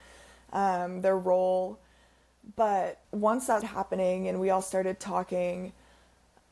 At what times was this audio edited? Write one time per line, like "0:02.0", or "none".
0:03.0
0:03.6